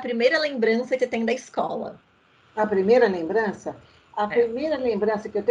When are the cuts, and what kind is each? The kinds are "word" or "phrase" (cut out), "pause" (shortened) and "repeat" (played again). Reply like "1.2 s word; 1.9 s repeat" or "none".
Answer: 1.0 s word